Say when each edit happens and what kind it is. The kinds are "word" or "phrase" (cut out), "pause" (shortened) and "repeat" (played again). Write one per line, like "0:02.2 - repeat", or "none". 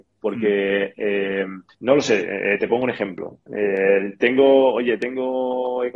0:01.7 - pause